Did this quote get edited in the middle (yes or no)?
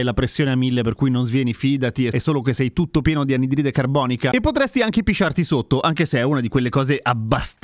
no